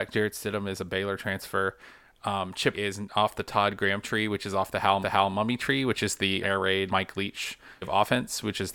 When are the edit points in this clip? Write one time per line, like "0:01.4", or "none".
0:02.7
0:05.0
0:06.4
0:06.9
0:07.8

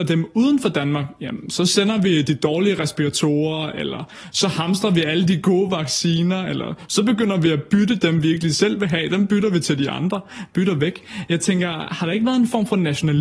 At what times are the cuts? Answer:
none

